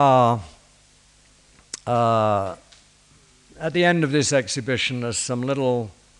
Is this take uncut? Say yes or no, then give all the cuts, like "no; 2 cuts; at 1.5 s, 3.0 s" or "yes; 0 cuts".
yes; 0 cuts